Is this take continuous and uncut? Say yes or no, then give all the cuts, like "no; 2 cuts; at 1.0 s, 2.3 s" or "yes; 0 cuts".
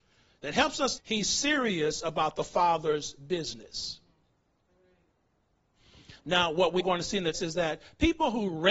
no; 4 cuts; at 1.0 s, 6.2 s, 6.8 s, 7.3 s